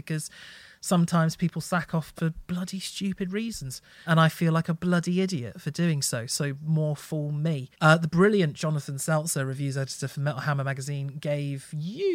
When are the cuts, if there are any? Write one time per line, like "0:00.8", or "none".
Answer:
0:02.2
0:04.1
0:07.7